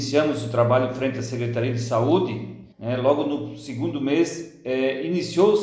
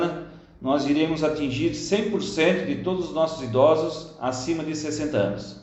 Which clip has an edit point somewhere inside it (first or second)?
first